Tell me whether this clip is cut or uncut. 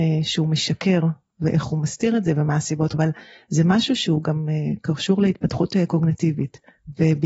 cut